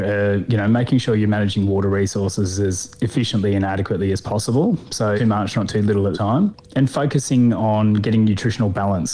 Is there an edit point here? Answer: yes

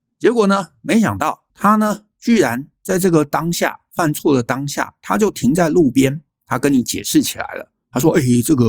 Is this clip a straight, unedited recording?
no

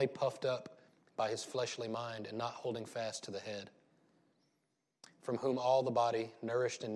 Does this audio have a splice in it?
no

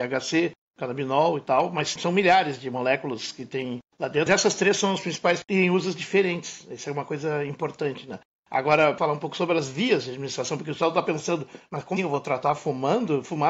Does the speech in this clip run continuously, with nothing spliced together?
no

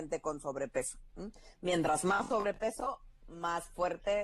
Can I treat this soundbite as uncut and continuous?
yes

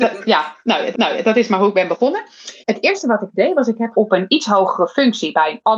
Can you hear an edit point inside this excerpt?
yes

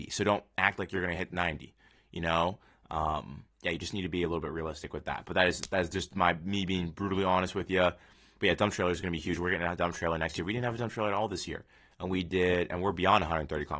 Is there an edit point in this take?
yes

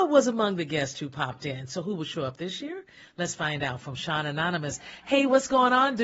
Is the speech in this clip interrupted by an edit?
no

